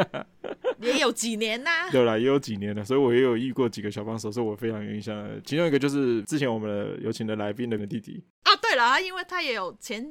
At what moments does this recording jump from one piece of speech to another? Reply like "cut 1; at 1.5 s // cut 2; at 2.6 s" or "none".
cut 1; at 7.8 s